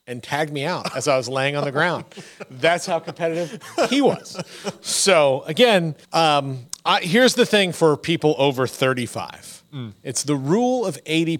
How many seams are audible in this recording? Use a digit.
1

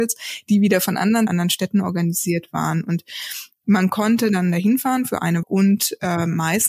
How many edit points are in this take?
2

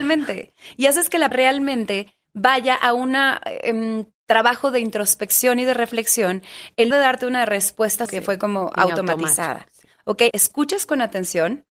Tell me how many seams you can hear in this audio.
4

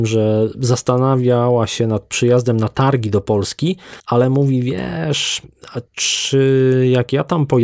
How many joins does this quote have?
2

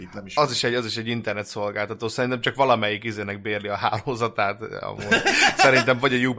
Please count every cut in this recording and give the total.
0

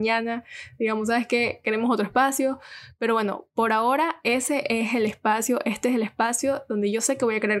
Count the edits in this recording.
0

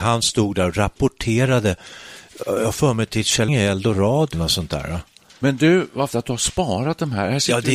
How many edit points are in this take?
3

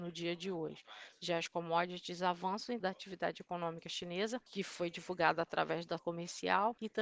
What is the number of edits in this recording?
2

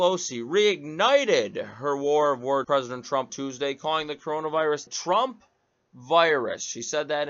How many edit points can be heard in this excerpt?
3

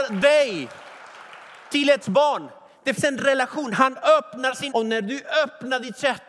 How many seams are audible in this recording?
3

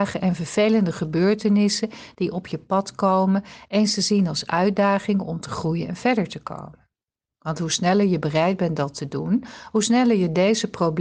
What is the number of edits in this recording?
0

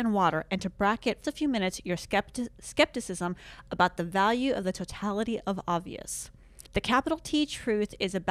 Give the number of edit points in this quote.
2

